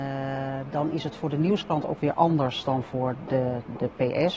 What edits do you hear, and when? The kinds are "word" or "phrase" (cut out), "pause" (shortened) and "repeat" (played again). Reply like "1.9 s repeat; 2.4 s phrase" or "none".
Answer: none

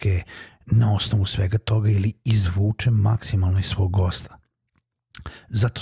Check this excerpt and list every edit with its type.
none

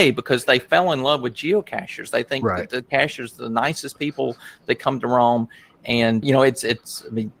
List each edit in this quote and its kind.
6.2 s word

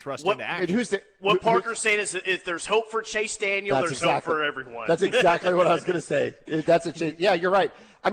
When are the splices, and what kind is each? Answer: none

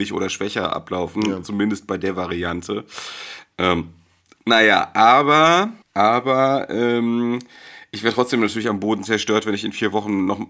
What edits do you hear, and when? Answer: 5.8 s pause

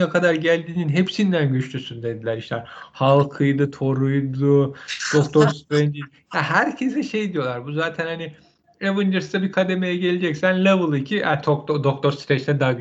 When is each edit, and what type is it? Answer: none

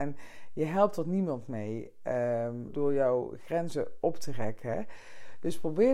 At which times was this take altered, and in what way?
2.7 s word

